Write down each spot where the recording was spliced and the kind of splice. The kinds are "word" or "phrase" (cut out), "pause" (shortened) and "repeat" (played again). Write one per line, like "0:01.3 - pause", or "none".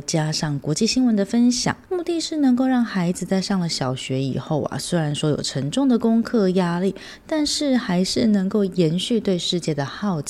0:01.8 - pause